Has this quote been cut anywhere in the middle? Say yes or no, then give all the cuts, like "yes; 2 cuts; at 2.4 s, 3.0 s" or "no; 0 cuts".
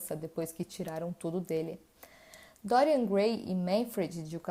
no; 0 cuts